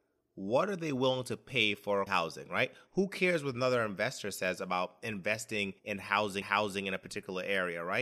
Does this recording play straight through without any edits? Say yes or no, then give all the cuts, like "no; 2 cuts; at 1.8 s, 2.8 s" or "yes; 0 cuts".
no; 3 cuts; at 2.1 s, 5.8 s, 6.4 s